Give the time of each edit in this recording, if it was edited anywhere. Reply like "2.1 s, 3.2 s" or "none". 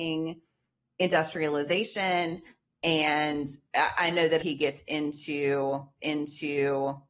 4.4 s, 6.0 s

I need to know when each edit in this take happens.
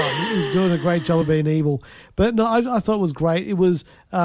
none

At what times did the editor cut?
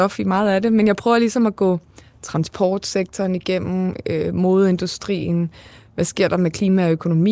none

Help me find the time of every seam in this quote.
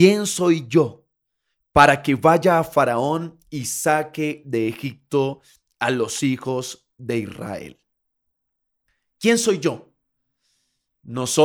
none

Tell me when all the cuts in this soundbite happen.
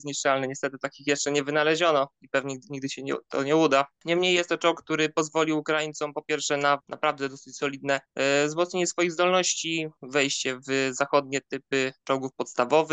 3.9 s, 8.0 s, 10.0 s, 12.0 s

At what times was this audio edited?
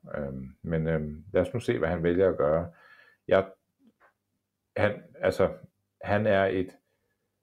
none

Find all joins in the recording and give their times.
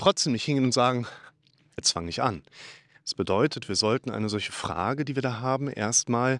1.8 s

